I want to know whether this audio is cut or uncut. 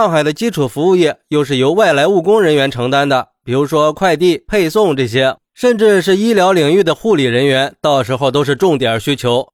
cut